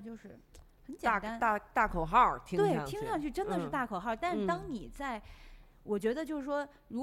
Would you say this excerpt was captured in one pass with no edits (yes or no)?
yes